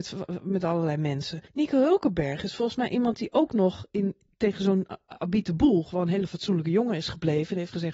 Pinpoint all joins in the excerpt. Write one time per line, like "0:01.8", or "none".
0:01.5